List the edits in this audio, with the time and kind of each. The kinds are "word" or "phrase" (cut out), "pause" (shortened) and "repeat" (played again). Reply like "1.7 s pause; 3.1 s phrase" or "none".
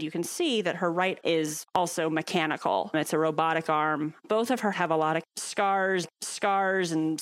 1.2 s word; 4.7 s word; 6.0 s repeat